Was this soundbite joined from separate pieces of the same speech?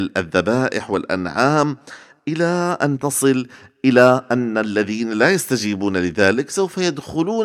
no; 0 cuts

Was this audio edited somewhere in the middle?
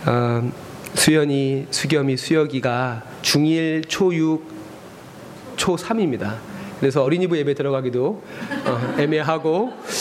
no; 0 cuts

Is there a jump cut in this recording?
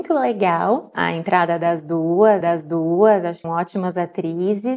yes; 2 cuts; at 2.4 s, 3.4 s

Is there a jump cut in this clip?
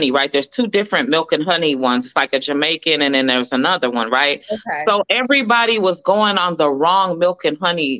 no; 0 cuts

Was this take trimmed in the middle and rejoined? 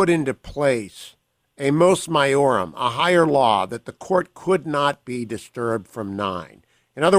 no; 0 cuts

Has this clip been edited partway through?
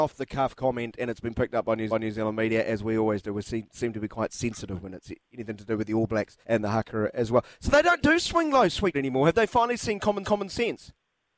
yes; 4 cuts; at 1.9 s, 6.4 s, 8.9 s, 10.2 s

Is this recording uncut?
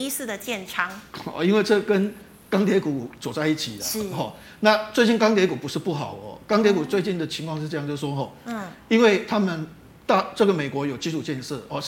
yes; 0 cuts

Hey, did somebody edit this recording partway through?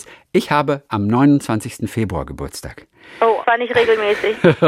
yes; 1 cut; at 3.4 s

